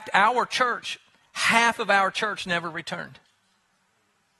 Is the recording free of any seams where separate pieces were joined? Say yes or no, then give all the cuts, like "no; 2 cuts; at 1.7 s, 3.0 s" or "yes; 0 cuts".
yes; 0 cuts